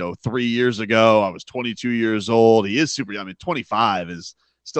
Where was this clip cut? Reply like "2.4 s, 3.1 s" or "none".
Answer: none